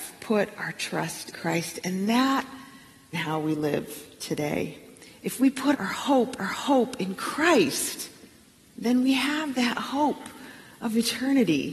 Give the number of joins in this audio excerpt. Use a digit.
5